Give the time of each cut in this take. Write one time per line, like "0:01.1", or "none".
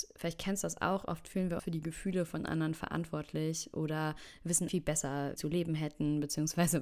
0:01.6
0:04.7
0:05.4